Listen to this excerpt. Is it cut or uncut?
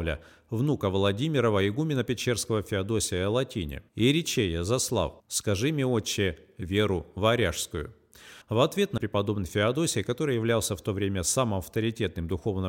cut